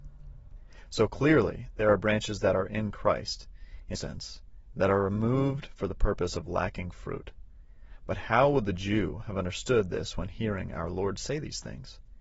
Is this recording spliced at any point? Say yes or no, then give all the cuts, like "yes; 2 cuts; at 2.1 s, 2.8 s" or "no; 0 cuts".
yes; 1 cut; at 4.0 s